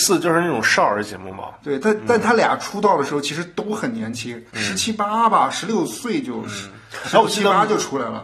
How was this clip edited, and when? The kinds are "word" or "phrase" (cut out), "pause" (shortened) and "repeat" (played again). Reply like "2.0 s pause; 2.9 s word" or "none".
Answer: 4.5 s pause